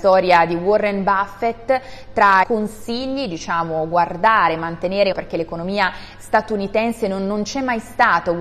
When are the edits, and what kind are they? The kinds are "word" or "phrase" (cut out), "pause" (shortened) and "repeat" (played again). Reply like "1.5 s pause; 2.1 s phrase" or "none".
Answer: 2.4 s word; 5.1 s phrase